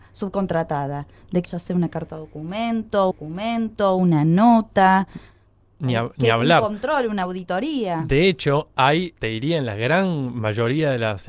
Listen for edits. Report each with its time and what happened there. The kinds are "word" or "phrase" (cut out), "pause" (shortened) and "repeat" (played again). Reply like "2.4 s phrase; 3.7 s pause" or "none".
1.4 s word; 3.1 s repeat